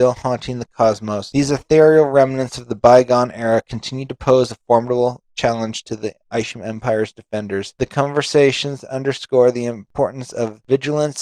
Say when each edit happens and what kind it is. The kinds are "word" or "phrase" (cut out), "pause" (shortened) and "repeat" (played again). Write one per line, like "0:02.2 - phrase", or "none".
none